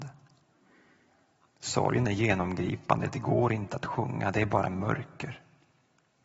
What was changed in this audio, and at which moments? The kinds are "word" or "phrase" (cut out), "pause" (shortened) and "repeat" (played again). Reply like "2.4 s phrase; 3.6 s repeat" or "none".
none